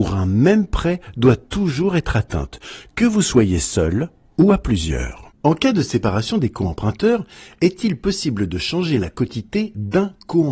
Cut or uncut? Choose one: uncut